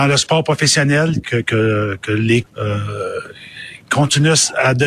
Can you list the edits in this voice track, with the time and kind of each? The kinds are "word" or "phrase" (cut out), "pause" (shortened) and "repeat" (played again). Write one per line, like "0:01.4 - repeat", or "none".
0:01.2 - word
0:02.4 - word